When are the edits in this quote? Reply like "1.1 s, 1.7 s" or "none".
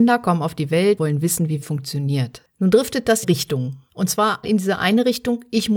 1.0 s, 1.6 s, 3.2 s, 3.9 s, 4.4 s

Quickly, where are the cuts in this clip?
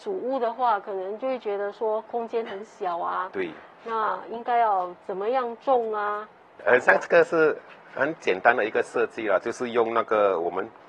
none

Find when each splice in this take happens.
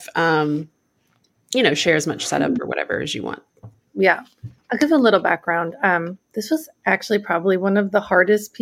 none

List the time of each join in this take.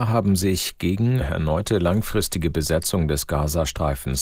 1.2 s

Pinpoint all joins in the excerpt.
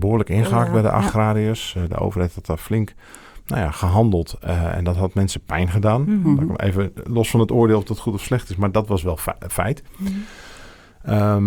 none

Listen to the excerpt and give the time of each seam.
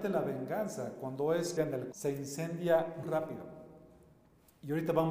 1.6 s, 1.9 s, 3.0 s

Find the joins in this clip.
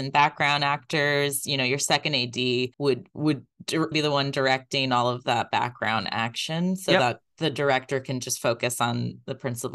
2.7 s, 3.9 s

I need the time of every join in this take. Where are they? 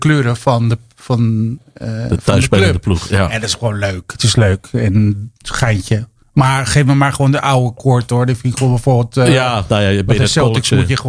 5.4 s

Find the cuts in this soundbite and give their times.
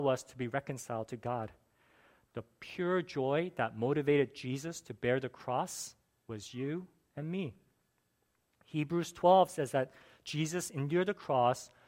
none

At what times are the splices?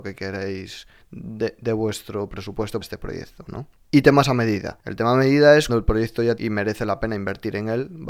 1.0 s, 2.8 s, 5.7 s, 6.4 s

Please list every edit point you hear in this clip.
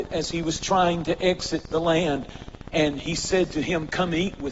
none

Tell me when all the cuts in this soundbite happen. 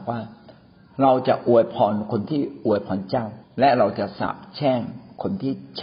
3.4 s

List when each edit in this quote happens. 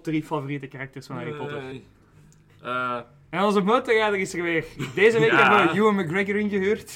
1.7 s

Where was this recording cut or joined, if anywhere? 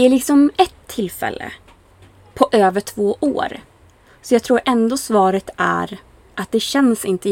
none

